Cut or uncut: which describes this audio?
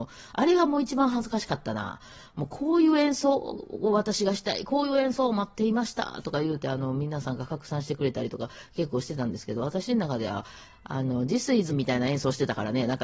cut